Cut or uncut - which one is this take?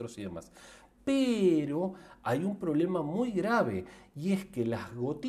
uncut